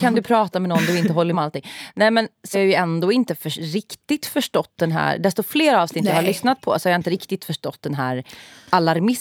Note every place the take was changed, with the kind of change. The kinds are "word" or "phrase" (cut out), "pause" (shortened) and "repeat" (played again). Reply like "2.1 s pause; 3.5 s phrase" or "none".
1.3 s word; 2.5 s word